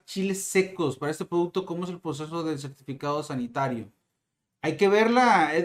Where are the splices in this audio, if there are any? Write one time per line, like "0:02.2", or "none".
none